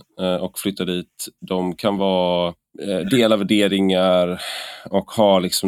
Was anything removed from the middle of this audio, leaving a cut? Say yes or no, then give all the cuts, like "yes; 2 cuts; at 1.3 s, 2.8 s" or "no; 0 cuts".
no; 0 cuts